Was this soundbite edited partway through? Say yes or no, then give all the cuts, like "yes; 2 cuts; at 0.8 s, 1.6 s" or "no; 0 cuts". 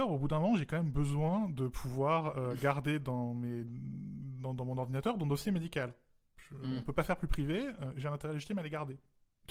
no; 0 cuts